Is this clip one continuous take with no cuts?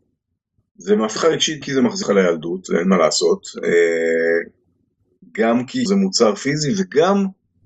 no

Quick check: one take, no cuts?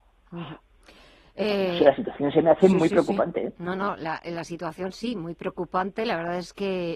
yes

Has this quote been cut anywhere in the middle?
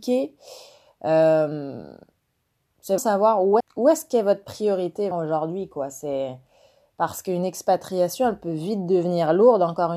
yes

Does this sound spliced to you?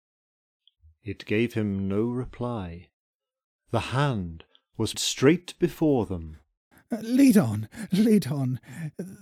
yes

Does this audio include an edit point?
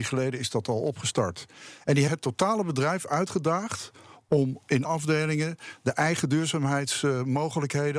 yes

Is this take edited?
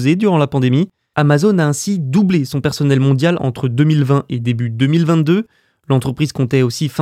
no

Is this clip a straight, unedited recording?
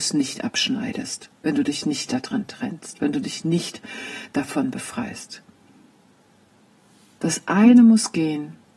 yes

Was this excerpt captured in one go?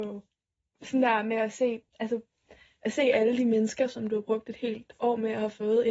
yes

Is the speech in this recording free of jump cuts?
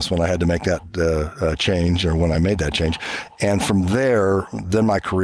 yes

